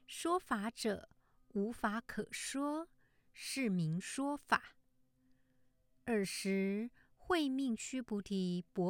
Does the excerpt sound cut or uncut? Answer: uncut